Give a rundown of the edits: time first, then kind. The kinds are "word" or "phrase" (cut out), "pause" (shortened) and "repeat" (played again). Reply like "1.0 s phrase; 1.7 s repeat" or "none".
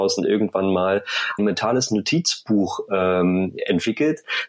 1.4 s phrase